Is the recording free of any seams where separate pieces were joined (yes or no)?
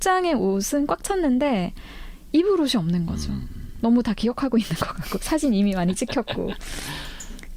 yes